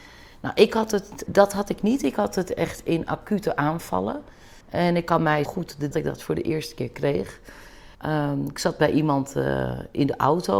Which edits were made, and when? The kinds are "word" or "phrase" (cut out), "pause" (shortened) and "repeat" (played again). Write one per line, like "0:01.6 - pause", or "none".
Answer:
0:01.3 - word
0:04.6 - pause
0:05.5 - phrase
0:05.9 - phrase
0:07.9 - pause